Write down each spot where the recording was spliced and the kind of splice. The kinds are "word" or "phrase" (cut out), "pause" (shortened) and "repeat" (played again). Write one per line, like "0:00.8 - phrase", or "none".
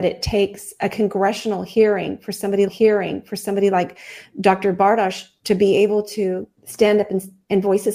0:02.7 - repeat
0:06.6 - pause